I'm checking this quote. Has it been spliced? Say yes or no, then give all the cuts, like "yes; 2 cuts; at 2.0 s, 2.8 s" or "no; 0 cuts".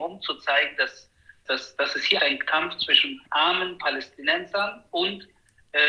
yes; 3 cuts; at 1.5 s, 2.2 s, 3.3 s